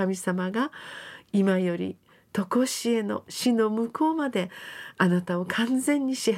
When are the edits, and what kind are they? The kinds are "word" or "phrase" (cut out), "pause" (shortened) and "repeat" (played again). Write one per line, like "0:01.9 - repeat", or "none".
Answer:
none